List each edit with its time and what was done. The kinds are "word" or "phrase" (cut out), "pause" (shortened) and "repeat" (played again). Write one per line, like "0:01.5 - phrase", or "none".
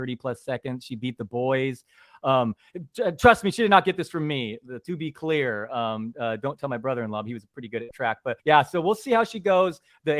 0:08.4 - pause

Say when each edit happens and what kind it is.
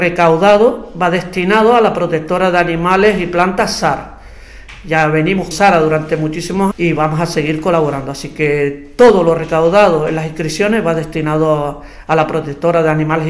0:05.5 - phrase
0:06.7 - word

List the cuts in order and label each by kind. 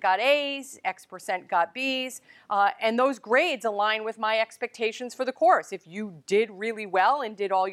none

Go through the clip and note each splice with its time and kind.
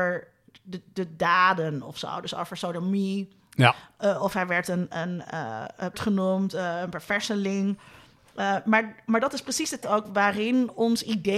0:04.9 - word
0:05.9 - word
0:09.8 - word

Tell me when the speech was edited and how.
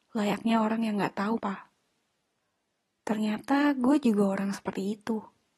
0:01.4 - word

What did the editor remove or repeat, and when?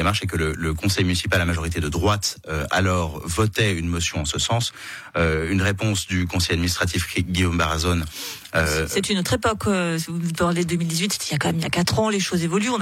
none

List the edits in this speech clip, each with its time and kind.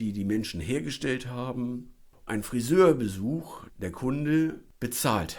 0:02.3 - word
0:03.7 - word

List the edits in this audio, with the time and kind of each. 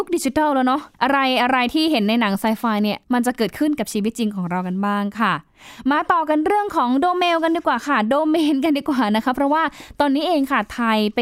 0:00.9 - pause
0:03.0 - pause

